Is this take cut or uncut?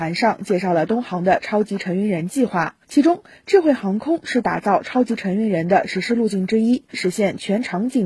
cut